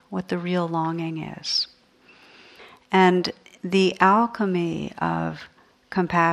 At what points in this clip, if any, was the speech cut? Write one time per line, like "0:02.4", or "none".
none